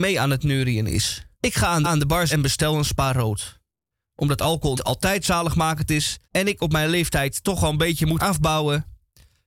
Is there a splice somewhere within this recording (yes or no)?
yes